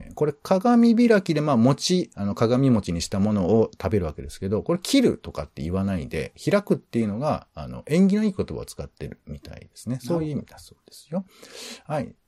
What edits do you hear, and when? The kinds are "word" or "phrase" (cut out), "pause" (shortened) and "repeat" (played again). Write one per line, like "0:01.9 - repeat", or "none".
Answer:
0:02.1 - word